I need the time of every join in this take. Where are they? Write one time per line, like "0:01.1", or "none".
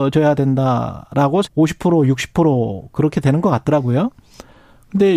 0:01.4